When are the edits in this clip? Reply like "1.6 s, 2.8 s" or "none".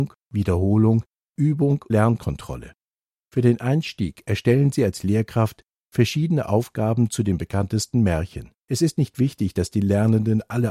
1.9 s, 8.6 s